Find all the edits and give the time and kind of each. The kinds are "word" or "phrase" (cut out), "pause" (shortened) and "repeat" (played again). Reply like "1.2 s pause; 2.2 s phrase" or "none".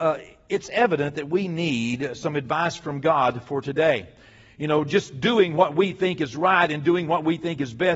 none